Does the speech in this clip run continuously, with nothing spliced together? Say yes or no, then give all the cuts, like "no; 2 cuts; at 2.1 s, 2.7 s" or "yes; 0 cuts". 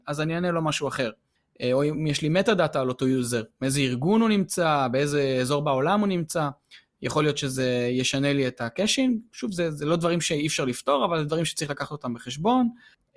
yes; 0 cuts